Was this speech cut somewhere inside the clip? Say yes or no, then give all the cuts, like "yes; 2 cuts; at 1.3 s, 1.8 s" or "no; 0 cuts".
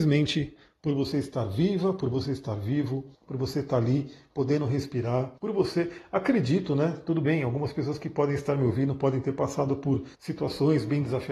yes; 3 cuts; at 3.1 s, 5.4 s, 10.1 s